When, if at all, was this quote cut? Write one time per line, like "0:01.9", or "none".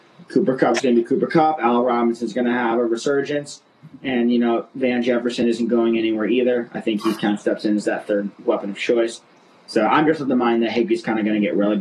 none